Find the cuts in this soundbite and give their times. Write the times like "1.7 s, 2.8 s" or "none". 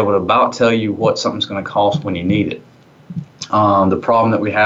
none